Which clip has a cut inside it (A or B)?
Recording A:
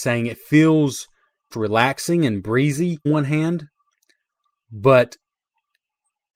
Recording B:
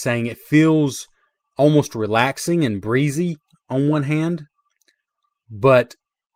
A